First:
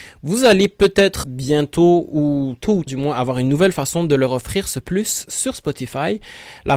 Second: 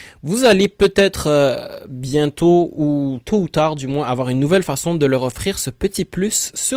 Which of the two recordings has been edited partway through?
first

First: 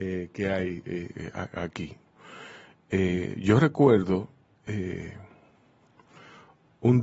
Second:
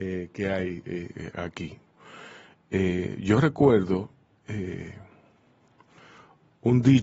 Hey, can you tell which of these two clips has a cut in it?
second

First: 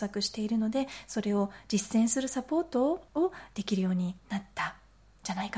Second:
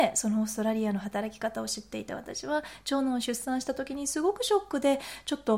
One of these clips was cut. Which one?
first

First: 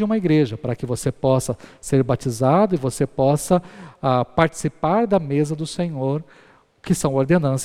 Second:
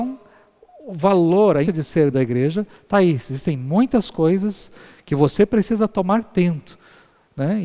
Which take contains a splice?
second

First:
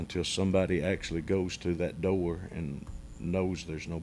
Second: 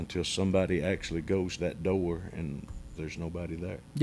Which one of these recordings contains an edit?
second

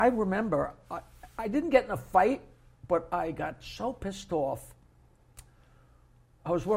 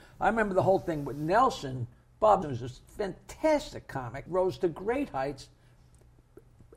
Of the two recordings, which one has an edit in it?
second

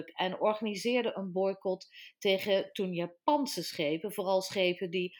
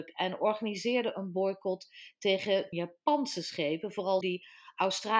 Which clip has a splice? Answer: second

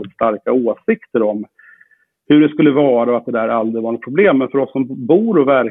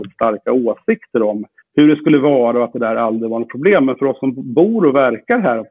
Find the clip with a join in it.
second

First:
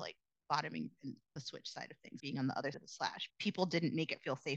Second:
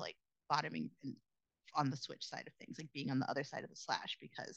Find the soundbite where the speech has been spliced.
first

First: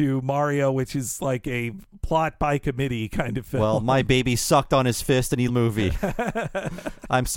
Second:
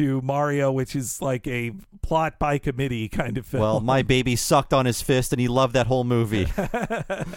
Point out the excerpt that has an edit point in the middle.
first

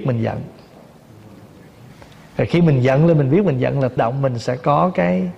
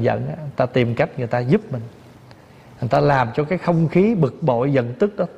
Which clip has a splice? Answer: first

